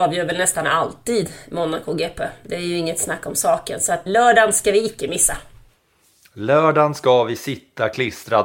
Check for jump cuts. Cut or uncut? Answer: cut